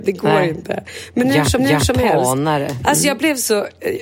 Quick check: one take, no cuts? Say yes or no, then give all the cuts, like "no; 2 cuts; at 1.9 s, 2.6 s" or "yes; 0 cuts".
no; 1 cut; at 1.6 s